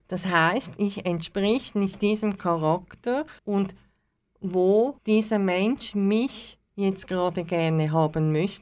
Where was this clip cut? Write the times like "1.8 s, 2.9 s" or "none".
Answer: 3.4 s, 5.0 s, 6.7 s